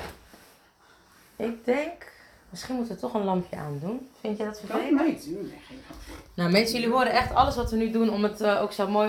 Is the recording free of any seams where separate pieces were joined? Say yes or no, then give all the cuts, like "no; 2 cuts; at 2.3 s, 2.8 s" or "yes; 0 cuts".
yes; 0 cuts